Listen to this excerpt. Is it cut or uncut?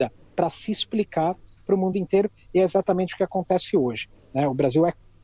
uncut